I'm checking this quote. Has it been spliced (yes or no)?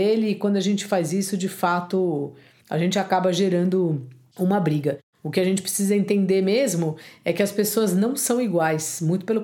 no